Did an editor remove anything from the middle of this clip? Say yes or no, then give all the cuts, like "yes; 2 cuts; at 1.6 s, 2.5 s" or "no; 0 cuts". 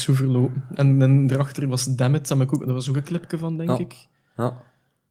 no; 0 cuts